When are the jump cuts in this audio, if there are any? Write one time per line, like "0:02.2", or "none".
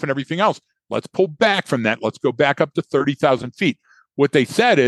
none